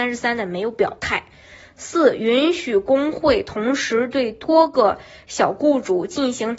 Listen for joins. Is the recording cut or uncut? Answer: uncut